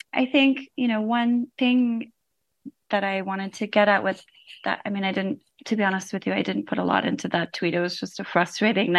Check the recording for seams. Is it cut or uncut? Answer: cut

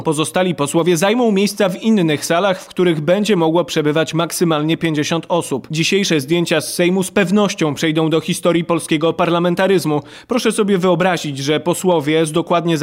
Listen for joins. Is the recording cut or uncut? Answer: uncut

